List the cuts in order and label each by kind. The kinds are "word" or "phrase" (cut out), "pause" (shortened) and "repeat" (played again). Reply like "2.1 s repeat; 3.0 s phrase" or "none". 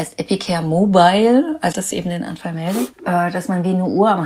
1.7 s phrase

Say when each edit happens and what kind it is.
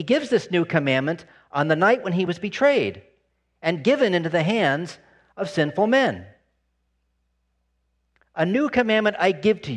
none

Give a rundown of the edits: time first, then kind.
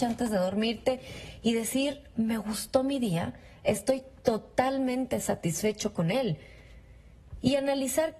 none

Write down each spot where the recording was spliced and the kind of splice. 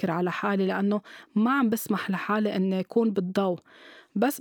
none

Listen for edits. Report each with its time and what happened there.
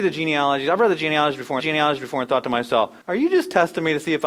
1.6 s repeat; 3.0 s pause

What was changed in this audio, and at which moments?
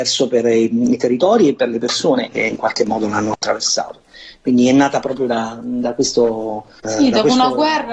none

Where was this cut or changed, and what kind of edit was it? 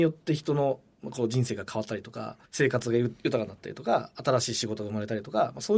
2.5 s pause

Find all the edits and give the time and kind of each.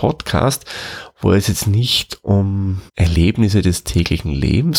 2.9 s pause

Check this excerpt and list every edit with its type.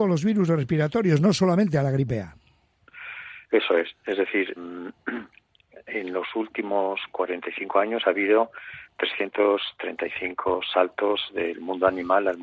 4.6 s word

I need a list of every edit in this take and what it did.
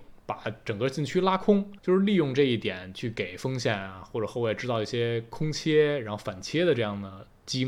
1.8 s word

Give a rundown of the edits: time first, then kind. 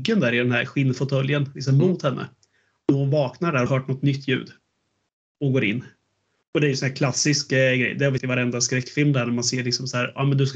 3.7 s word; 8.2 s word

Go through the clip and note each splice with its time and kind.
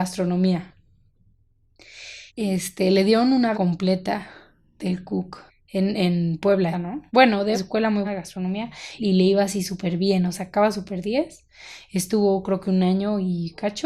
2.3 s pause; 3.5 s word; 5.5 s pause; 6.7 s word; 7.1 s pause; 7.5 s word; 8.0 s word; 9.0 s word; 10.3 s word

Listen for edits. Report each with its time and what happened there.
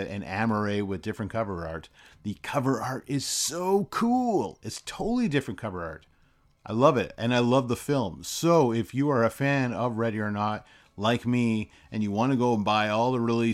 none

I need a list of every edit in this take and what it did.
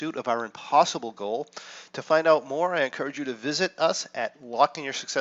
none

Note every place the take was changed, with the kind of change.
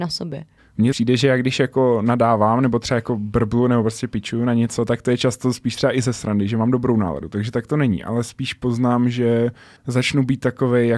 0.9 s word; 9.8 s pause

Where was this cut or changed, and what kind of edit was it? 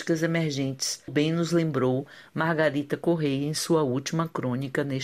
1.1 s word

